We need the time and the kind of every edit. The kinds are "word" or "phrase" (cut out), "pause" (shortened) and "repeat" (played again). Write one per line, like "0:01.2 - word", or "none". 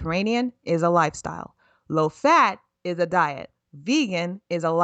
none